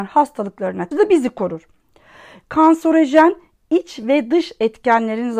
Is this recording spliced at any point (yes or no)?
yes